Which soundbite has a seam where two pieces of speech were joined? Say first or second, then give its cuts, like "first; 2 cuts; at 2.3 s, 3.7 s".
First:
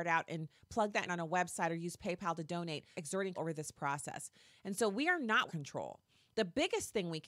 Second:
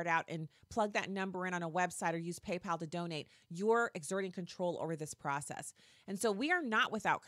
first; 4 cuts; at 1.1 s, 2.9 s, 3.3 s, 5.5 s